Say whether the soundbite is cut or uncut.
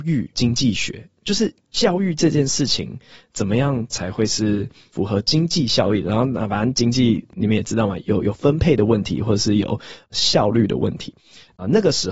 uncut